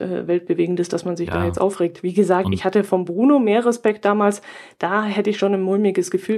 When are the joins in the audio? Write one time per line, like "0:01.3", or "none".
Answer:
none